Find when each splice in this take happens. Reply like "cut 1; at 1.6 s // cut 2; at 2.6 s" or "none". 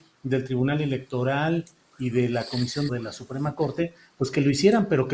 cut 1; at 2.9 s